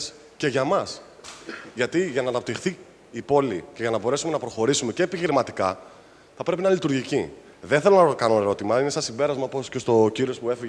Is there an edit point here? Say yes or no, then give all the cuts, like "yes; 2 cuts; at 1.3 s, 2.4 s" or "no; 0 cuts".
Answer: no; 0 cuts